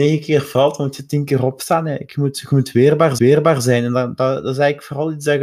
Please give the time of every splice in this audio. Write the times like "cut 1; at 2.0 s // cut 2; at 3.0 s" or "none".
cut 1; at 3.2 s